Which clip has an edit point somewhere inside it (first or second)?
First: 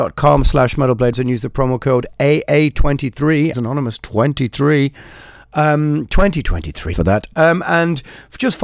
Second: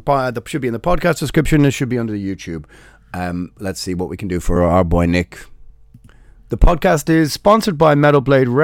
first